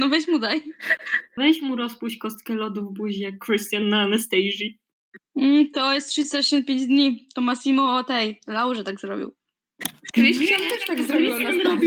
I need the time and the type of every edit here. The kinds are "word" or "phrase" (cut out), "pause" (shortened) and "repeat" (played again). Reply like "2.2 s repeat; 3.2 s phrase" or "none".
none